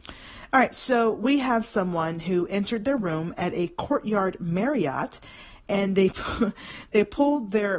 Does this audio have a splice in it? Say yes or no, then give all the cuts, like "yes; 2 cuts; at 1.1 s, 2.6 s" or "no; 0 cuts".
no; 0 cuts